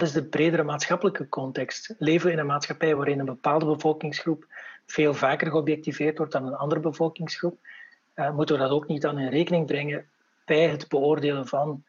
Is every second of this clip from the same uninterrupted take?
yes; 0 cuts

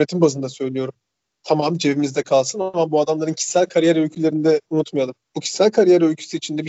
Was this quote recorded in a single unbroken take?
yes; 0 cuts

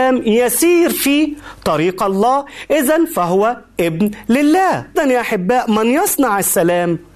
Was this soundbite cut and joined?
yes; 1 cut; at 5.0 s

